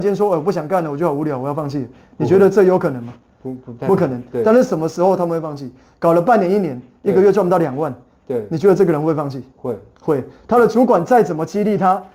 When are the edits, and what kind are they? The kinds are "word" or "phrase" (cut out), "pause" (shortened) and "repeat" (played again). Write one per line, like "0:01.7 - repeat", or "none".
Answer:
none